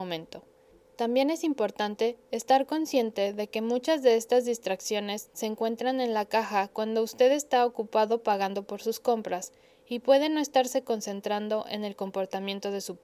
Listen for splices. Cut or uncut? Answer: uncut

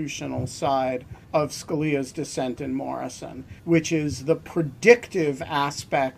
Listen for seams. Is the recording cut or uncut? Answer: cut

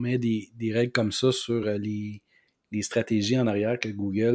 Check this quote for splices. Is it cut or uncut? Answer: uncut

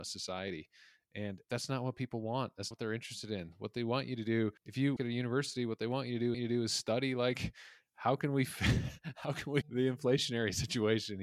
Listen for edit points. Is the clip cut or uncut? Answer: cut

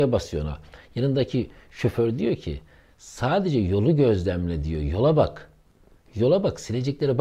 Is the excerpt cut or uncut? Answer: uncut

